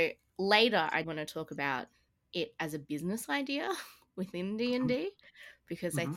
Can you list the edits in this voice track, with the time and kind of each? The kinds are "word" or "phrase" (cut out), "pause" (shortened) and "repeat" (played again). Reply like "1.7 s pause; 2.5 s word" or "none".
1.0 s word

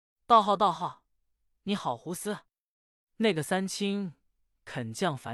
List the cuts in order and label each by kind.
none

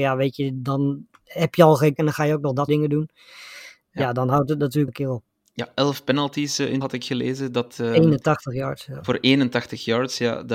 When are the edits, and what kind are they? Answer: 2.0 s word; 2.7 s word; 4.9 s word; 6.8 s word

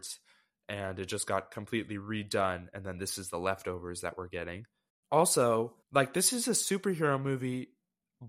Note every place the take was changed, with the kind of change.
5.8 s pause

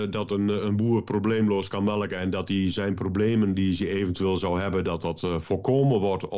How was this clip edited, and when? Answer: none

